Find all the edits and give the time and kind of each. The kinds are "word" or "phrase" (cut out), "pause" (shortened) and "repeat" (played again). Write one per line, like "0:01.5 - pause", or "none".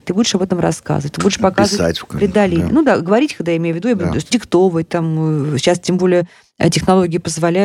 0:04.3 - word

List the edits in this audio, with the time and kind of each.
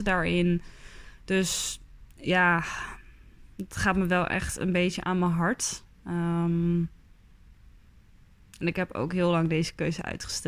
0:02.1 - pause

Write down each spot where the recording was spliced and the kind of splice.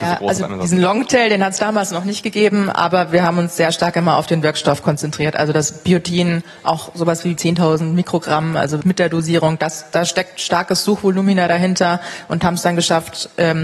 0:07.4 - word
0:08.8 - word

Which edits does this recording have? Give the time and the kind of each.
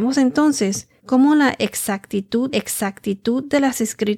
0:01.0 - pause
0:02.5 - repeat

